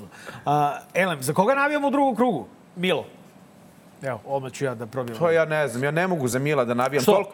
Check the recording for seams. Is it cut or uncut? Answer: uncut